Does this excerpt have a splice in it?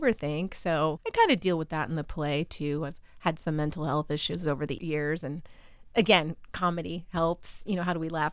no; 0 cuts

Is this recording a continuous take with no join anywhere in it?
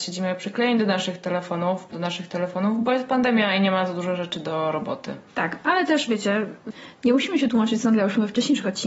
no; 2 cuts; at 1.9 s, 5.3 s

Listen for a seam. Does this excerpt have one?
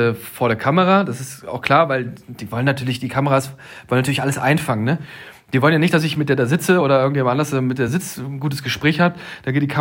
no; 0 cuts

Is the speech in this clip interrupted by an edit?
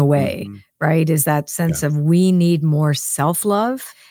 no; 0 cuts

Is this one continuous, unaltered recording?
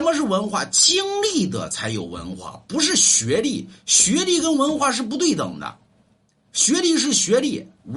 yes; 0 cuts

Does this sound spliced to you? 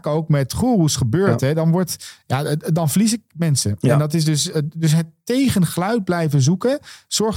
no; 0 cuts

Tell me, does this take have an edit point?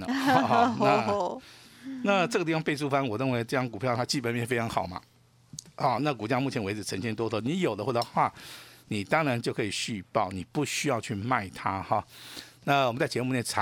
no; 0 cuts

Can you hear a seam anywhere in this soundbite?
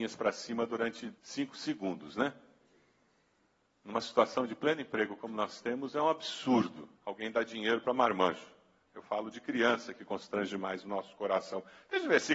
yes; 2 cuts; at 1.2 s, 7.0 s

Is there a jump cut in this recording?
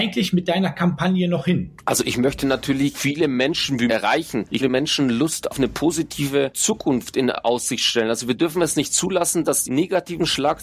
yes; 5 cuts; at 2.9 s, 3.9 s, 4.6 s, 5.5 s, 9.6 s

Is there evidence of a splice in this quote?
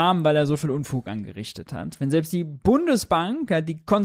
no; 0 cuts

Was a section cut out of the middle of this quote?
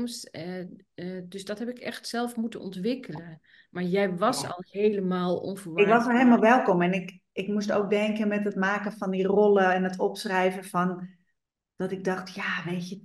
no; 0 cuts

